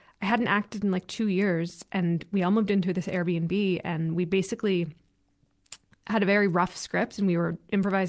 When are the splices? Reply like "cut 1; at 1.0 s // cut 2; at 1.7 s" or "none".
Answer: none